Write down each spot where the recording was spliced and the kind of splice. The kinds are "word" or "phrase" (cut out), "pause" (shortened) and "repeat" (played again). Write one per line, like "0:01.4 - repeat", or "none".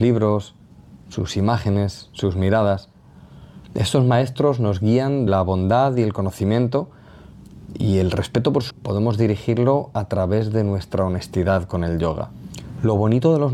0:03.6 - pause
0:05.3 - word
0:08.7 - word